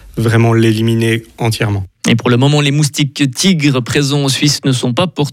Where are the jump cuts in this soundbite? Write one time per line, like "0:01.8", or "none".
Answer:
none